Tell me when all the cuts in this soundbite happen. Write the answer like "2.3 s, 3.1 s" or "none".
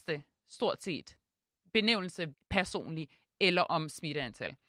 2.3 s